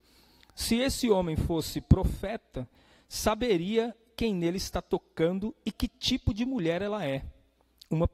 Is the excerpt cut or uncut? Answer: uncut